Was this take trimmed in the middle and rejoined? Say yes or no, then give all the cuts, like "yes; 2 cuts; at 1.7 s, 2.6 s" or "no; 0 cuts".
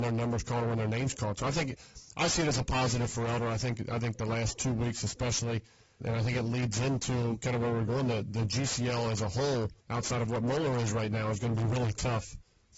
yes; 2 cuts; at 6.0 s, 9.8 s